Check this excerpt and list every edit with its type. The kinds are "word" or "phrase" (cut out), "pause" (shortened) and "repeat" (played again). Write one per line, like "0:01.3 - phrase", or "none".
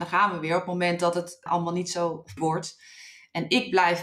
0:01.5 - word
0:02.4 - phrase